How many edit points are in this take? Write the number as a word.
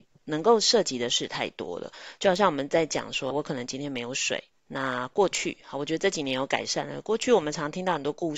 two